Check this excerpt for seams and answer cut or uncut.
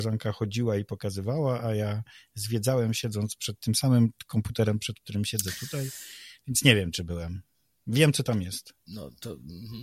uncut